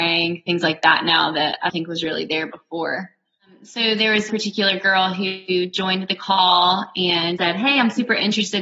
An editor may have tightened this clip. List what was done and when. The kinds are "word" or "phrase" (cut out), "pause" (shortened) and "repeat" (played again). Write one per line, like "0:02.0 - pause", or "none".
0:01.7 - word
0:04.3 - word
0:07.4 - word